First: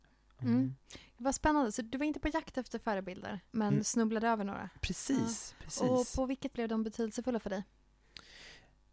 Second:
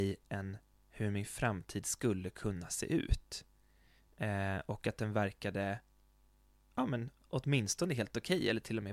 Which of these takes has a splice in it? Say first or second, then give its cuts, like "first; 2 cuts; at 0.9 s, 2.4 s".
first; 2 cuts; at 3.5 s, 6.5 s